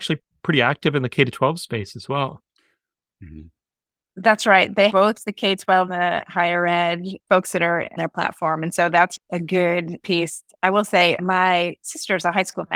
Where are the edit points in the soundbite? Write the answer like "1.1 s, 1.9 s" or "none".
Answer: 4.9 s, 5.9 s, 8.0 s, 9.2 s, 10.0 s, 11.2 s